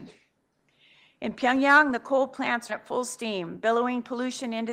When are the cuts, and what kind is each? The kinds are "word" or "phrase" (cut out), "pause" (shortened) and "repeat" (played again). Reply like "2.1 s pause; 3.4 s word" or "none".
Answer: 2.7 s word